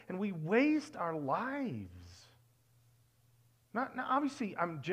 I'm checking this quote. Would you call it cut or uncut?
uncut